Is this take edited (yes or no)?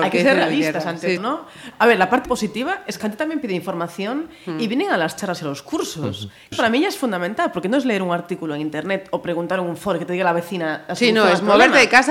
yes